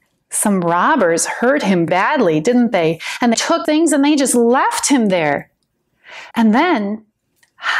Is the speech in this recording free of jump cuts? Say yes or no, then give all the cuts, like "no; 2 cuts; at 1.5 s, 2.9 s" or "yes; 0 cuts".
no; 4 cuts; at 1.9 s, 3.3 s, 3.6 s, 6.3 s